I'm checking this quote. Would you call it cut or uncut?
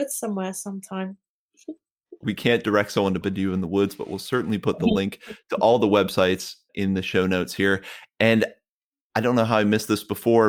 cut